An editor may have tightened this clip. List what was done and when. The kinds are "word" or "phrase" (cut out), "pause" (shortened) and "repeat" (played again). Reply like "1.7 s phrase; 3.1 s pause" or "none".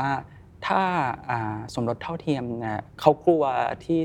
2.9 s pause